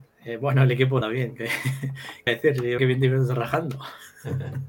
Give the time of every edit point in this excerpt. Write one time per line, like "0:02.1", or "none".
0:01.0
0:02.3
0:02.8